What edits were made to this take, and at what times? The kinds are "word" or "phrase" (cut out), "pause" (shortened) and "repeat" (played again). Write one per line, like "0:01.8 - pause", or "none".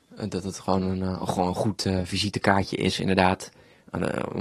none